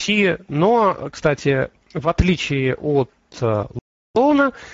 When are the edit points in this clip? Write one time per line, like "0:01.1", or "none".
none